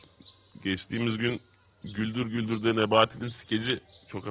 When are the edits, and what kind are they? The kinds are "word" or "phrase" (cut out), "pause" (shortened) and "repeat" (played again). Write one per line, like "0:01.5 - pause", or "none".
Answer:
none